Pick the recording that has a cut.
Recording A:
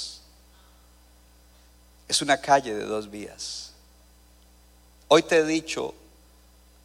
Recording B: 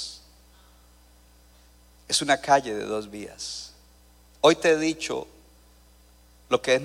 B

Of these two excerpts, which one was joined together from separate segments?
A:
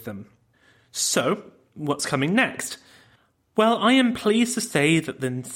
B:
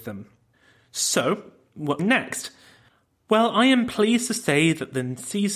B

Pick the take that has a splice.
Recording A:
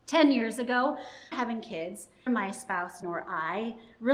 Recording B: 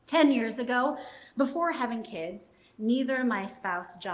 A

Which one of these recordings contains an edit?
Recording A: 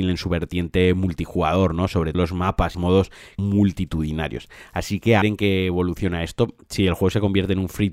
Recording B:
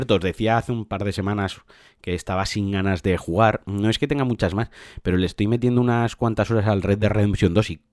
A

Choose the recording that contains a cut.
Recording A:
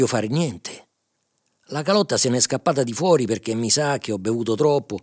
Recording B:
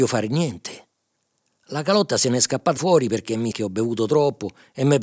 B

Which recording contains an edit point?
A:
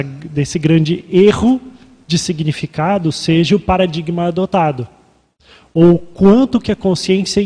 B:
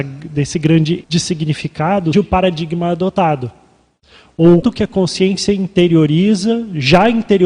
B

